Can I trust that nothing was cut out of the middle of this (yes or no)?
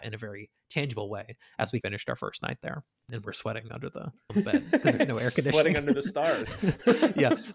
no